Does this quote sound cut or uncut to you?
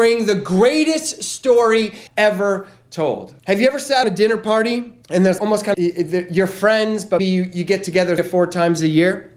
cut